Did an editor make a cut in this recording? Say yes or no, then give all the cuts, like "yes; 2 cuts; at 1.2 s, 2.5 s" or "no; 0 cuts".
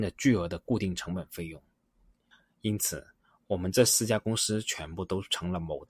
no; 0 cuts